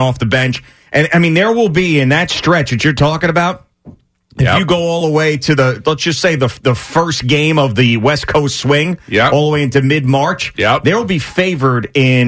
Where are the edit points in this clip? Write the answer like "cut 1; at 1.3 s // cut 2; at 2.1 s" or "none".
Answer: none